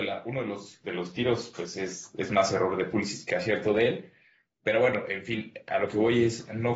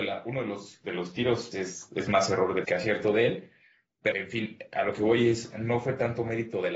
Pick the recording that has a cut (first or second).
second